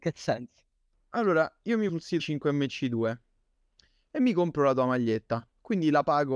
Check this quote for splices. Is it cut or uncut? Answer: cut